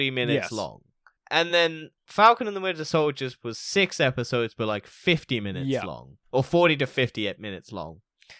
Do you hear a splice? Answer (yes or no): no